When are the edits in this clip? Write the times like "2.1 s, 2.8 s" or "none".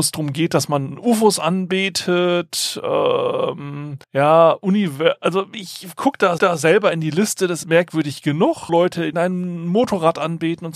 4.0 s, 6.4 s, 7.6 s, 8.7 s, 9.1 s